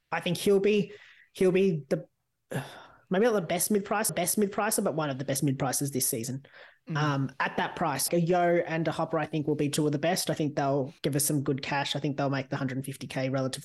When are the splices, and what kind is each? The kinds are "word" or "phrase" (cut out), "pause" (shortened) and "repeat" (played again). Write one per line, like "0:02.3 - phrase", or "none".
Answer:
0:04.1 - repeat
0:08.1 - word
0:11.0 - pause